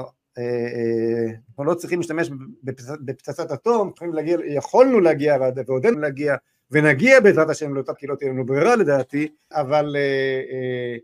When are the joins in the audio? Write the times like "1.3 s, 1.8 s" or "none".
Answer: 1.6 s, 4.0 s, 5.9 s, 7.9 s, 9.5 s